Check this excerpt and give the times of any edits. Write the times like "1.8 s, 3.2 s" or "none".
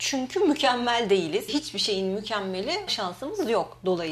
1.5 s, 2.9 s